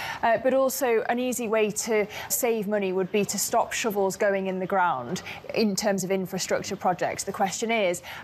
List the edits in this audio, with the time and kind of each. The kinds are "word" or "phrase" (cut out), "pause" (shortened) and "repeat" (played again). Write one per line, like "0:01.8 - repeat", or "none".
0:02.3 - word